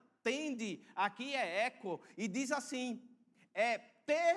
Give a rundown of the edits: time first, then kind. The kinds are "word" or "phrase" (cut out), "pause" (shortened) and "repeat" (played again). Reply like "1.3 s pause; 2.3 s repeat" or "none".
none

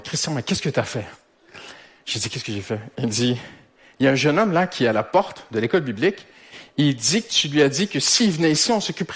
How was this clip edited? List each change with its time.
none

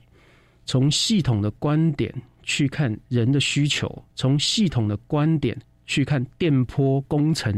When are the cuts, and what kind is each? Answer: 4.1 s pause

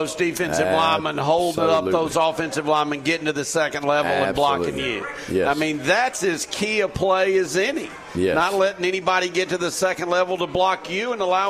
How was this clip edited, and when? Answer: none

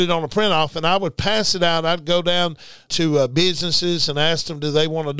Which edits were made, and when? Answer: 2.9 s word

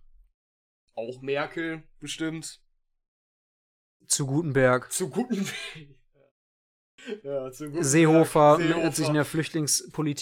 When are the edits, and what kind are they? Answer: none

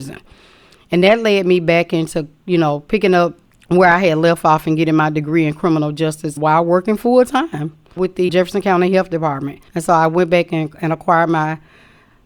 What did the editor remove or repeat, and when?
3.4 s pause; 6.4 s word; 8.0 s word; 8.3 s word; 9.7 s pause

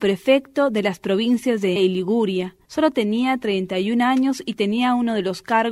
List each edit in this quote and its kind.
1.8 s word

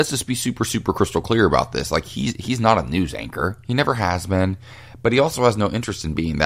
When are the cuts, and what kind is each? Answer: none

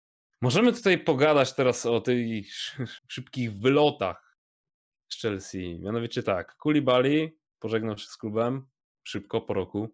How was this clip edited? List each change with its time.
3.0 s word

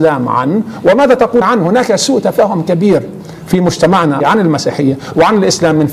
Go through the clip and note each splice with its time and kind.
1.4 s word; 4.2 s word

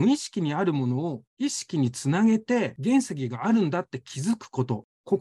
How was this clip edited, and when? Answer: 1.3 s pause

